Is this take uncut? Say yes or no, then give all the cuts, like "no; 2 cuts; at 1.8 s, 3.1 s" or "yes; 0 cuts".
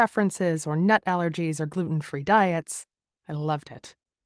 yes; 0 cuts